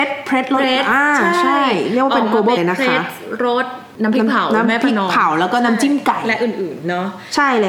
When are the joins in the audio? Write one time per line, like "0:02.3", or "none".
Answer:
0:02.6